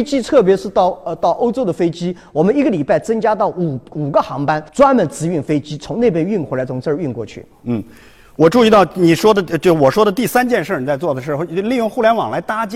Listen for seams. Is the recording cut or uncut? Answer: cut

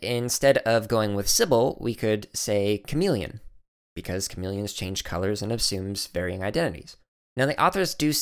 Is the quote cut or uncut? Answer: uncut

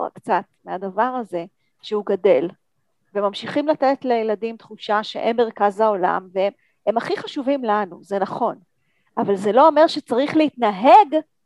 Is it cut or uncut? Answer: uncut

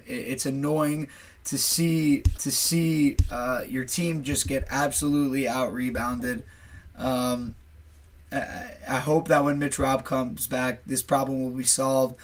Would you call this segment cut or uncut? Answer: cut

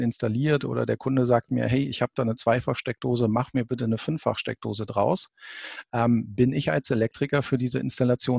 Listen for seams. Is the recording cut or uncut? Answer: uncut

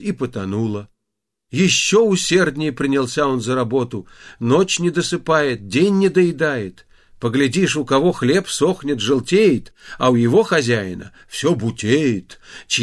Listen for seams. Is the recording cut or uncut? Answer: uncut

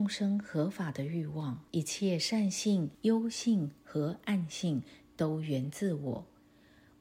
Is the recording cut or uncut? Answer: cut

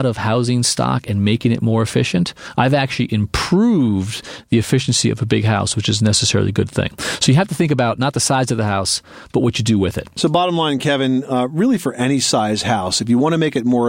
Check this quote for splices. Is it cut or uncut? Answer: uncut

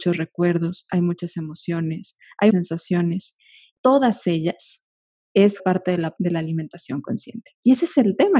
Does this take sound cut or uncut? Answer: cut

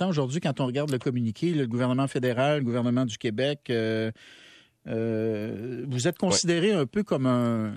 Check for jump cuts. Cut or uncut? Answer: uncut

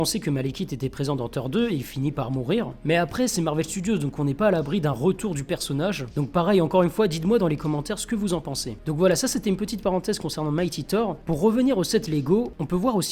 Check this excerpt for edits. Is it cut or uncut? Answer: uncut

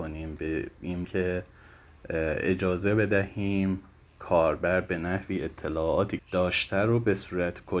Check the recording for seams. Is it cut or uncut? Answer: cut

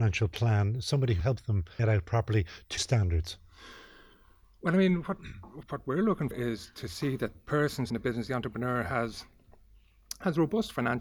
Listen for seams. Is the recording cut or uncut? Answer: cut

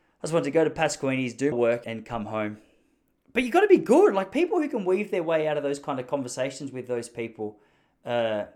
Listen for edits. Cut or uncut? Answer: cut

